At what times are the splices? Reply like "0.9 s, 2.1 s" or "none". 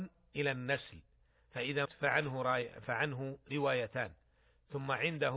1.9 s